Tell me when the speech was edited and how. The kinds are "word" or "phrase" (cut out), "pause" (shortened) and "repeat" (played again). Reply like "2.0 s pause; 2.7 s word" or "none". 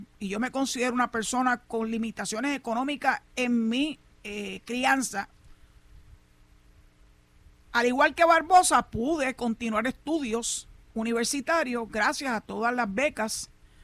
none

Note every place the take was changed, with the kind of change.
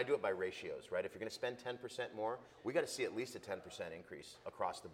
none

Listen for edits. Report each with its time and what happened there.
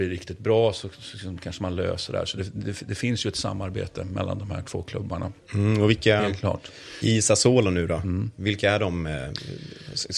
none

